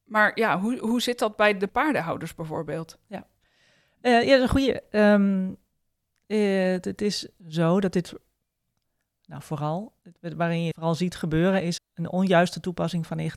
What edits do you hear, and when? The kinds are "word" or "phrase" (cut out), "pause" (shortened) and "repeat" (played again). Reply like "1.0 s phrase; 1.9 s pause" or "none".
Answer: 1.7 s word; 7.4 s word; 10.7 s word; 11.8 s word